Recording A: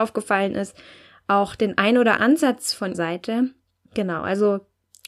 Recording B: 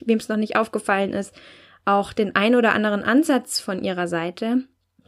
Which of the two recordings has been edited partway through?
A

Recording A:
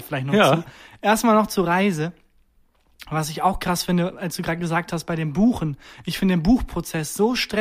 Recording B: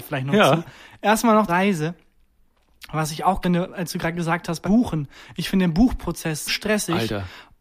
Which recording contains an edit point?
B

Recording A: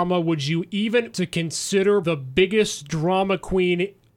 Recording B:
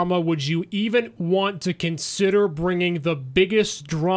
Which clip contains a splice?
A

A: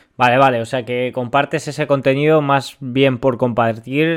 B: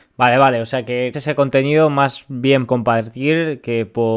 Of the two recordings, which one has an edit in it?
B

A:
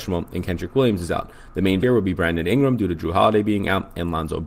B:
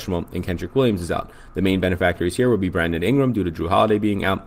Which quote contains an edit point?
A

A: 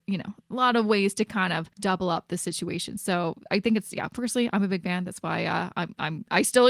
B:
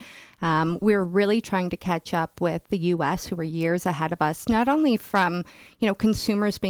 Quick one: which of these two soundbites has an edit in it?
A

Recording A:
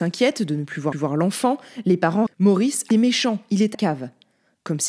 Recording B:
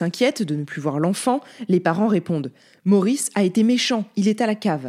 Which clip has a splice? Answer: A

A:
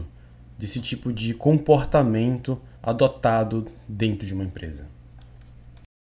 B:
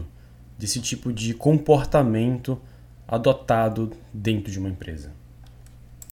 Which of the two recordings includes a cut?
A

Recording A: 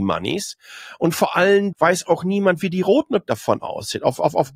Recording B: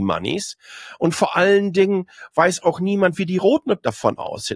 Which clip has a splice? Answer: A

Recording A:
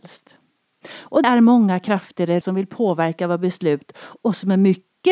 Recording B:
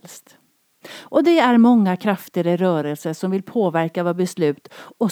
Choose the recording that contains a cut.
A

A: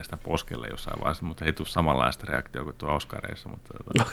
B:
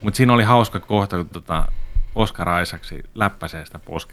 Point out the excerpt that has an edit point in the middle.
B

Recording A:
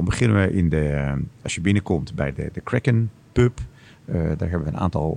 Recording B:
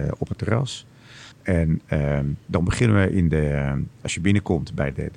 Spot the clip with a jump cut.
B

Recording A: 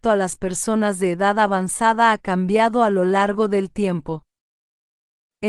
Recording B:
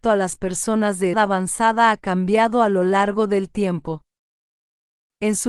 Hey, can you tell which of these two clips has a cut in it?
B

